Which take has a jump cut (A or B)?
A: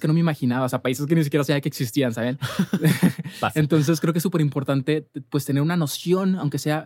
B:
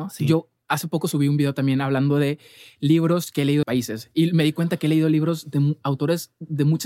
B